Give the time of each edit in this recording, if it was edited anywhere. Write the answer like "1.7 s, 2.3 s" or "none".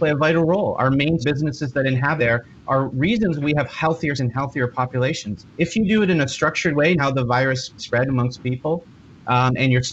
1.2 s, 2.2 s, 2.6 s, 3.4 s, 4.2 s, 5.5 s, 7.0 s, 7.8 s